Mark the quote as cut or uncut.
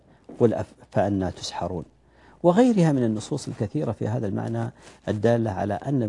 uncut